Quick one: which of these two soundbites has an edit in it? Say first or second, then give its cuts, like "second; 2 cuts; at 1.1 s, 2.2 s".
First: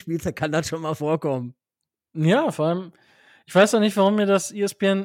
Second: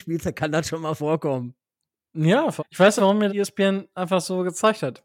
second; 3 cuts; at 2.6 s, 3.0 s, 3.3 s